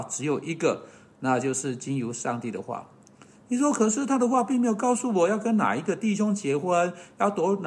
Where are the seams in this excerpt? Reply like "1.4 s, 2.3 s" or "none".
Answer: none